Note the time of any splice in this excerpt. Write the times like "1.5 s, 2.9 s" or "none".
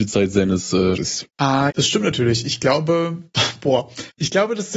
1.0 s, 1.7 s